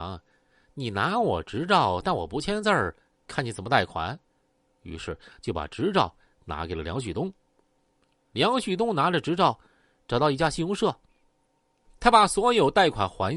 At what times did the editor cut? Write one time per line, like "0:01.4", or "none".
none

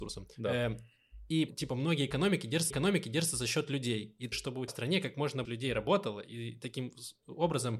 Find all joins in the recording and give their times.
0:01.5
0:02.7
0:04.3
0:04.7
0:05.4

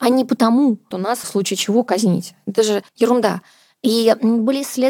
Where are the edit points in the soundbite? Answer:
0:00.9
0:01.2
0:02.9

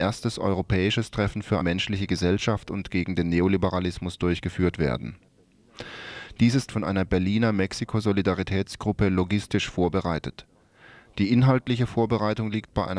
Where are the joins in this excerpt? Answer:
0:01.6
0:06.7

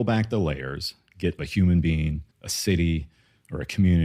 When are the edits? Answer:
0:01.4
0:02.3

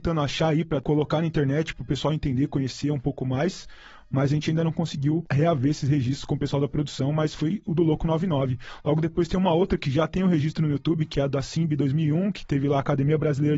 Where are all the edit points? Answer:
none

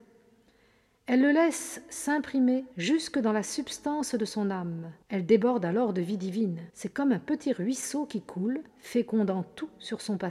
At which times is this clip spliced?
0:02.7
0:05.0
0:06.7
0:08.7

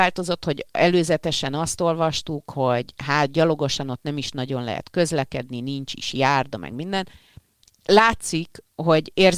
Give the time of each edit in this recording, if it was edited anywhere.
none

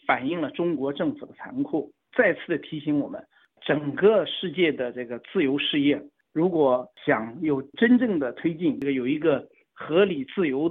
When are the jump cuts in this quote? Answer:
0:06.9

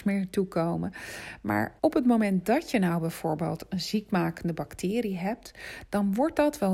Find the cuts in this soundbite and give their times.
0:01.8

